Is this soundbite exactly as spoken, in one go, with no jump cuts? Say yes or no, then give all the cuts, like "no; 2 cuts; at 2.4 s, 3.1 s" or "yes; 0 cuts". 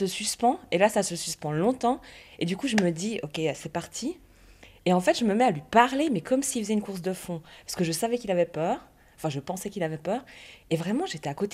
yes; 0 cuts